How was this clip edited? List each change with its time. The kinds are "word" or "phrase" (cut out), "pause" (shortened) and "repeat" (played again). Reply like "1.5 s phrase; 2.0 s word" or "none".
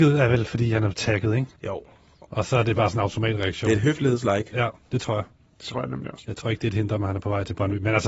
1.6 s pause